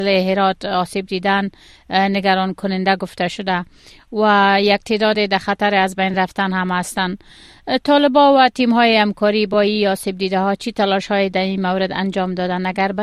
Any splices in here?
no; 0 cuts

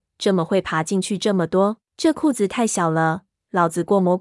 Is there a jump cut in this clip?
yes; 1 cut; at 1.8 s

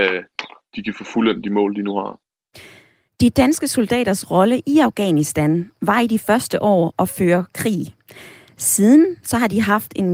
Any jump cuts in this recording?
no; 0 cuts

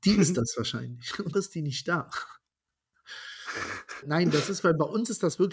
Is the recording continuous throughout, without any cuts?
no; 2 cuts; at 1.3 s, 4.0 s

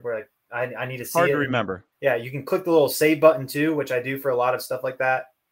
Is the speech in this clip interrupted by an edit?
yes; 1 cut; at 1.9 s

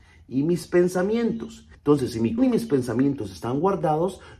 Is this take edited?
yes; 2 cuts; at 1.7 s, 2.4 s

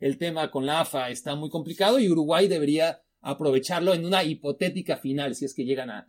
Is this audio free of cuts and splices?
yes; 0 cuts

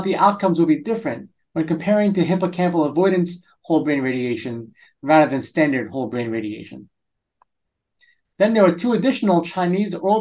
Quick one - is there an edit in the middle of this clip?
no; 0 cuts

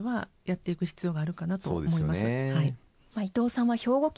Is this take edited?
no; 0 cuts

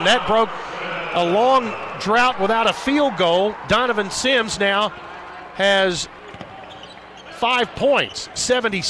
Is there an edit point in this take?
no; 0 cuts

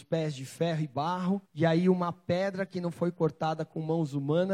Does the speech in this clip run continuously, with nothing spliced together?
no; 1 cut; at 1.5 s

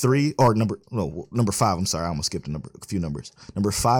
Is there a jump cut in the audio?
no; 0 cuts

